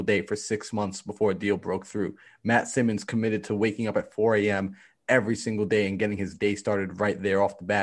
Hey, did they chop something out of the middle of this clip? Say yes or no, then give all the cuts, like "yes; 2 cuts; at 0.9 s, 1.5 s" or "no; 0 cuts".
no; 0 cuts